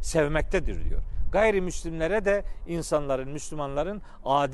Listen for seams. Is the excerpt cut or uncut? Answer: uncut